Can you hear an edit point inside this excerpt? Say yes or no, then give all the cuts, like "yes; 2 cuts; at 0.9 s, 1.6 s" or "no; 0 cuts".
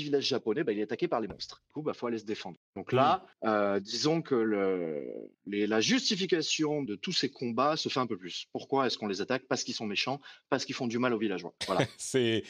yes; 6 cuts; at 1.7 s, 2.7 s, 3.3 s, 5.3 s, 6.9 s, 11.6 s